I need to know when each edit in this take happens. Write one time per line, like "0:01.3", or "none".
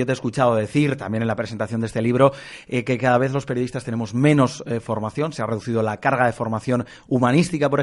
none